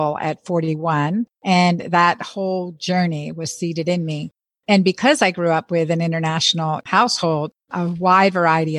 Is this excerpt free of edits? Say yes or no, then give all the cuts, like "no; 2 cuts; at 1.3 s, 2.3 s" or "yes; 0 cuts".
yes; 0 cuts